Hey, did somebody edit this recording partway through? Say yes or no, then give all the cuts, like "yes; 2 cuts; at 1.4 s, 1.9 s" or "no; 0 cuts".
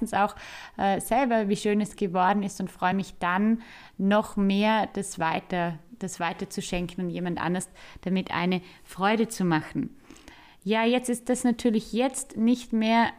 no; 0 cuts